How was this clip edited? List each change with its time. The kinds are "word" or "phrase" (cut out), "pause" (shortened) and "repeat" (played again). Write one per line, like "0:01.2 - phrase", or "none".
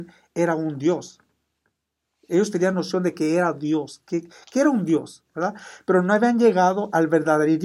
none